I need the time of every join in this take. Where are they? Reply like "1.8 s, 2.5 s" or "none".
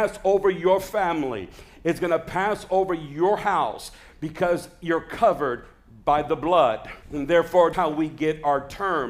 7.0 s, 7.7 s